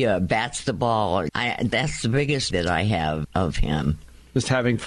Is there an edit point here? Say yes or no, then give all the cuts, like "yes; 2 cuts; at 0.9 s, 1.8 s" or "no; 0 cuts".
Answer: yes; 3 cuts; at 1.3 s, 2.5 s, 3.2 s